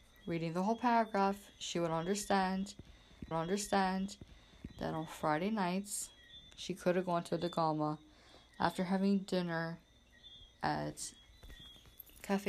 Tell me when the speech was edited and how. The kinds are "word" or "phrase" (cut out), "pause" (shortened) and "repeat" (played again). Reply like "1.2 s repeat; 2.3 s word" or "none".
3.3 s repeat; 7.3 s word; 10.5 s pause